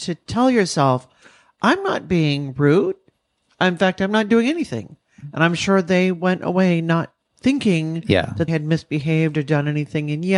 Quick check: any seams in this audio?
yes; 1 cut; at 8.5 s

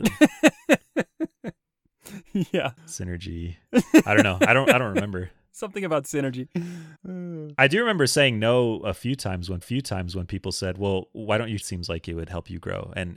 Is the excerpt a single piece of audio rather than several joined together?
no; 3 cuts; at 6.9 s, 9.6 s, 11.6 s

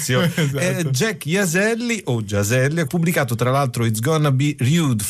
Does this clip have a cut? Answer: yes; 1 cut; at 2.9 s

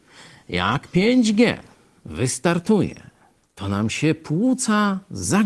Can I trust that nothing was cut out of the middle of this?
yes; 0 cuts

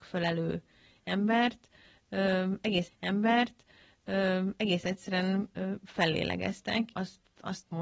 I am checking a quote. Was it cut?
yes; 2 cuts; at 2.9 s, 6.9 s

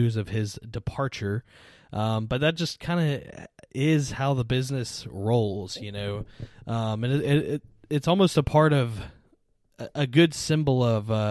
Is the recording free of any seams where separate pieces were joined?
yes; 0 cuts

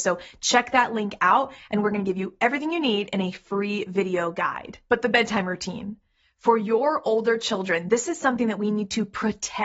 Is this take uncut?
yes; 0 cuts

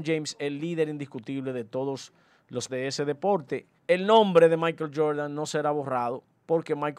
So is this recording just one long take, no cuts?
no; 2 cuts; at 2.7 s, 3.8 s

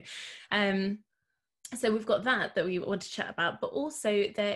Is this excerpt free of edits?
yes; 0 cuts

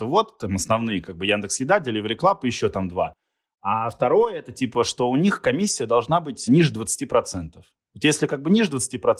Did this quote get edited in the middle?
no; 0 cuts

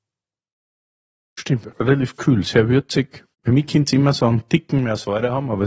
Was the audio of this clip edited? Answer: yes; 2 cuts; at 1.7 s, 3.3 s

